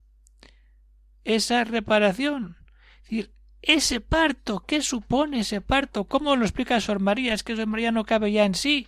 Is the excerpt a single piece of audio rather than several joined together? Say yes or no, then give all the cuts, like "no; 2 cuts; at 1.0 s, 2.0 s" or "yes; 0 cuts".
yes; 0 cuts